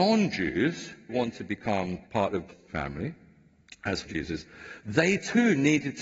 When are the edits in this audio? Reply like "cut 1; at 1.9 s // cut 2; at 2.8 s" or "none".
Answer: cut 1; at 1.1 s // cut 2; at 2.0 s // cut 3; at 2.5 s // cut 4; at 4.0 s